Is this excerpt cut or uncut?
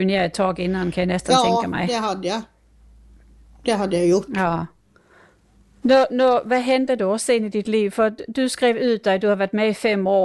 uncut